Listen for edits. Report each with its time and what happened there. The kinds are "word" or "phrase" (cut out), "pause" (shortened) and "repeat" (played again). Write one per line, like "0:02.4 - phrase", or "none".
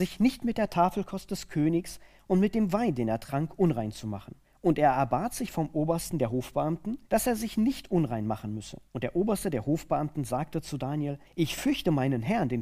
0:04.4 - pause
0:07.0 - pause
0:08.9 - pause
0:11.2 - pause